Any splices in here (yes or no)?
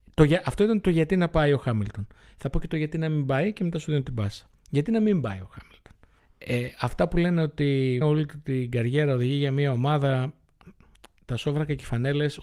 yes